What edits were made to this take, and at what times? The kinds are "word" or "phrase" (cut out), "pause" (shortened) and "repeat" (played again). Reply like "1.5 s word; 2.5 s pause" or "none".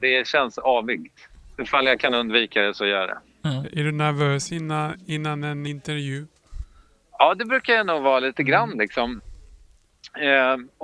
none